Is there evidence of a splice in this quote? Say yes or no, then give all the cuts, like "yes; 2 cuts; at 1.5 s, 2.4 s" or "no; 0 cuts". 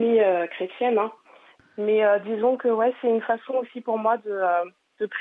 no; 0 cuts